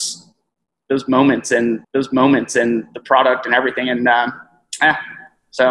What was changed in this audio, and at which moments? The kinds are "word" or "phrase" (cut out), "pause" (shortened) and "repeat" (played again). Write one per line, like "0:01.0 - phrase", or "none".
0:01.8 - repeat